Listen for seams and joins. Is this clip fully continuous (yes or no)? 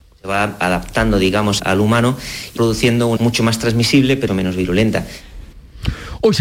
no